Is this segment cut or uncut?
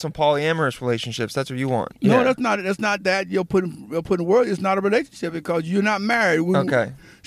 uncut